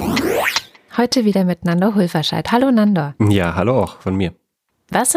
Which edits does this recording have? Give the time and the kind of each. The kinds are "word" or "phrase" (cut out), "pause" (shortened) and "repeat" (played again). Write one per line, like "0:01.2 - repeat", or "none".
0:03.2 - pause